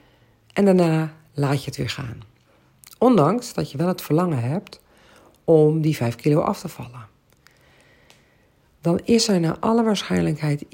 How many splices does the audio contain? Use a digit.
0